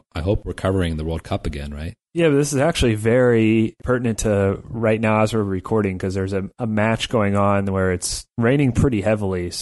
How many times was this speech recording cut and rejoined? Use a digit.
1